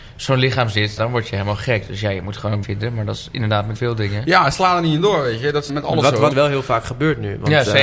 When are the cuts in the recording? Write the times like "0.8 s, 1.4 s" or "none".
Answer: 1.0 s, 2.6 s, 3.7 s, 5.7 s, 6.3 s